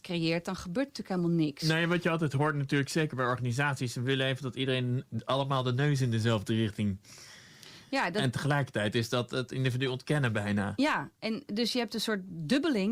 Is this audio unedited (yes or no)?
yes